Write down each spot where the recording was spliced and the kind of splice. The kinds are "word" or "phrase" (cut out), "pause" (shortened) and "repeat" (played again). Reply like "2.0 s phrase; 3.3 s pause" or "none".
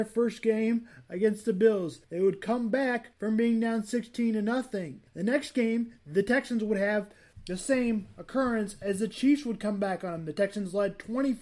2.0 s pause; 3.1 s pause; 5.1 s pause